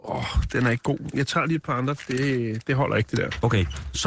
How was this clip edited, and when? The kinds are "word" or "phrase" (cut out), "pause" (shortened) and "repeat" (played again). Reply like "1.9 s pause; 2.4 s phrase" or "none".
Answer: none